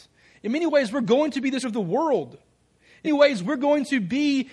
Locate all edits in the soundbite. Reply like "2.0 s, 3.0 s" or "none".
1.6 s, 3.0 s